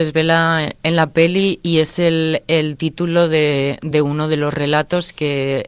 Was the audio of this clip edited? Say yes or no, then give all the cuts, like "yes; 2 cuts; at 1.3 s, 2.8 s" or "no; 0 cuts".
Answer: no; 0 cuts